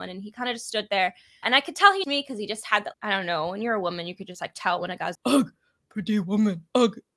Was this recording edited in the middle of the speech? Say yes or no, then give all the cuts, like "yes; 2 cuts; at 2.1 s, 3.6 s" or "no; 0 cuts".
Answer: yes; 4 cuts; at 1.4 s, 2.0 s, 2.9 s, 5.1 s